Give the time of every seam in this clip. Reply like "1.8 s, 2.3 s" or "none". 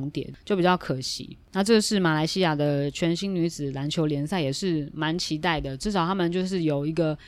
none